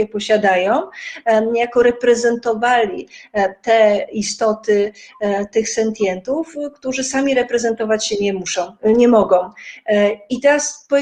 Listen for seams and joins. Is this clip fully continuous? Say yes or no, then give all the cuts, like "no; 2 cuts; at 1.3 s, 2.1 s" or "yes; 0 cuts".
yes; 0 cuts